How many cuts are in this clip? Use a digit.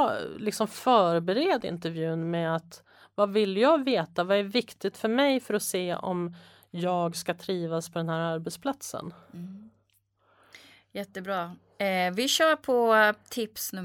0